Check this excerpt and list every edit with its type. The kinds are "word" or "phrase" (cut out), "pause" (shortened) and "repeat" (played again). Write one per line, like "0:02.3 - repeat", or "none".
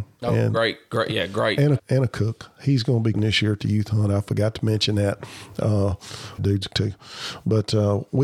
0:01.8 - word
0:03.1 - word
0:06.4 - word
0:06.7 - word